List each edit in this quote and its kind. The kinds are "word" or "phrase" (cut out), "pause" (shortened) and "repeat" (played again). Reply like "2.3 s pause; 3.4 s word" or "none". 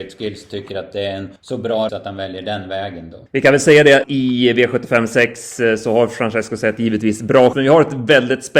1.4 s pause; 1.9 s word; 3.3 s pause; 4.0 s word; 7.5 s word